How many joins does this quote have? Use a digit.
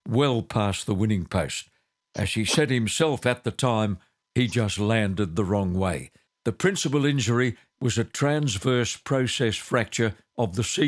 1